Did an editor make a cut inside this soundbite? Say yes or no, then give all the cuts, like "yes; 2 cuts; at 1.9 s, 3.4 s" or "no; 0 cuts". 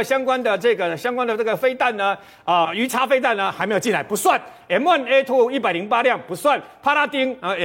yes; 1 cut; at 2.6 s